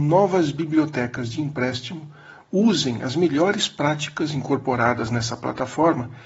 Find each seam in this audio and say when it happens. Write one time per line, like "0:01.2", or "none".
none